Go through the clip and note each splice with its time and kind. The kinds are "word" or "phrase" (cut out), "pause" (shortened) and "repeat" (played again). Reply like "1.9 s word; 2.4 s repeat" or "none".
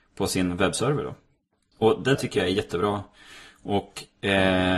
2.1 s word